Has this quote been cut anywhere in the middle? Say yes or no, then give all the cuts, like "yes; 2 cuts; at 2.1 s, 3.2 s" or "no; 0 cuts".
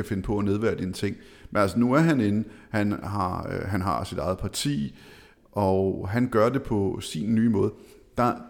no; 0 cuts